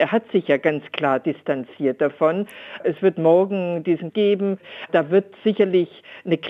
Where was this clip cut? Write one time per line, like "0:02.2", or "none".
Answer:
0:04.1